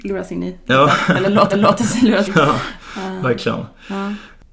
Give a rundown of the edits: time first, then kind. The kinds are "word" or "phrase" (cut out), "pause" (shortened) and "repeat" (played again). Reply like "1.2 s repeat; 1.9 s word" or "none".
1.5 s repeat; 2.3 s word